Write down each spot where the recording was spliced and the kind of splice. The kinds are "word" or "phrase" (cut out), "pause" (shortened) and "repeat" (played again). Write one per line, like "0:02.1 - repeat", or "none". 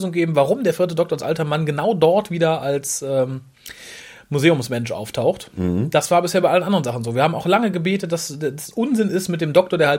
none